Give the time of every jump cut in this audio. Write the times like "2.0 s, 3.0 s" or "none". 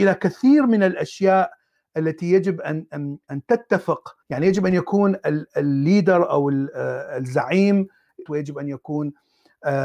4.2 s, 8.3 s

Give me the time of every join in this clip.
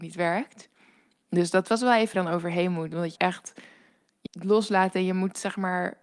2.1 s, 3.2 s, 4.3 s

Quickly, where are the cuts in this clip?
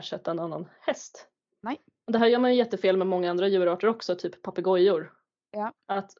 none

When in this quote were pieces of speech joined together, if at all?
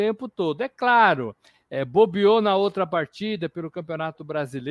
none

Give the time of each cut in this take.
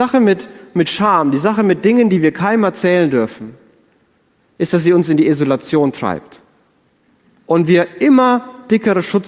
none

